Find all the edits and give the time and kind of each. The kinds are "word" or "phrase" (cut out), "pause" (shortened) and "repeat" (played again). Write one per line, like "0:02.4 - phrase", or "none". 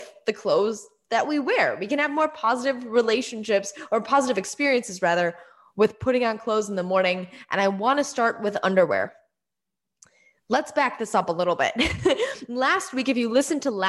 none